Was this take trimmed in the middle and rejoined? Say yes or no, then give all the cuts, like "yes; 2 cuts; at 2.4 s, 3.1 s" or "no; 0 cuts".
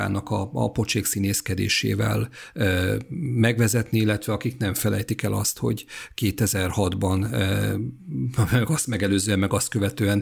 no; 0 cuts